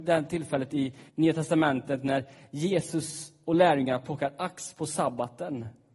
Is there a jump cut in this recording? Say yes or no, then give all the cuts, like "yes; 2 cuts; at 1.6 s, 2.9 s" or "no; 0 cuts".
yes; 1 cut; at 1.1 s